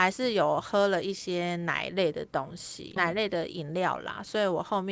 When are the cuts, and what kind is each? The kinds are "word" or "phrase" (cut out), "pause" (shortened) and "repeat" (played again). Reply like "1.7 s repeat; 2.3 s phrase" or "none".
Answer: 3.0 s word